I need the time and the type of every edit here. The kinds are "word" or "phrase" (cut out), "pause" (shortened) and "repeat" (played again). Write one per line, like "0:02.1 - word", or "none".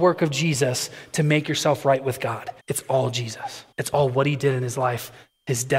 0:02.6 - pause
0:03.7 - pause